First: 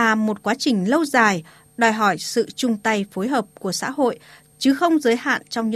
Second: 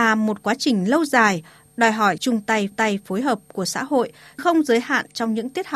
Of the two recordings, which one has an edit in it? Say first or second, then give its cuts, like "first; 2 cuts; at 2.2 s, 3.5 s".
second; 3 cuts; at 2.2 s, 2.7 s, 4.4 s